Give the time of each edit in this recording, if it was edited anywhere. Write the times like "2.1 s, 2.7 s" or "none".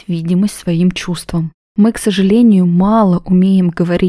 none